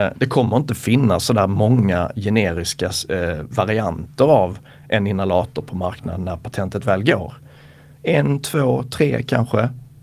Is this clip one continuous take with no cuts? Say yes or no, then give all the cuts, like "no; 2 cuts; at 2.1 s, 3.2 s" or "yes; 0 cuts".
yes; 0 cuts